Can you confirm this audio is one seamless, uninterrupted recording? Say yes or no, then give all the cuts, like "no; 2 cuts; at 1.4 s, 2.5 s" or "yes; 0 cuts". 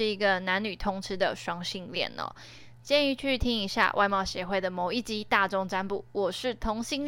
yes; 0 cuts